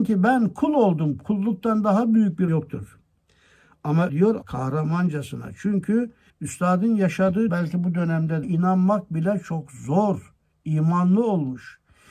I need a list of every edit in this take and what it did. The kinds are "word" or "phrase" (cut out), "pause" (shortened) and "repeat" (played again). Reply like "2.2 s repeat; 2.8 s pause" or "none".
2.5 s word; 4.1 s word; 4.4 s phrase; 6.3 s pause; 7.5 s word; 8.4 s phrase